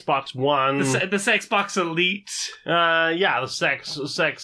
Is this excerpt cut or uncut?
uncut